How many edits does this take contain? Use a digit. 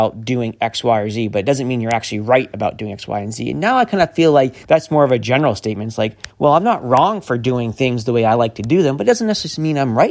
2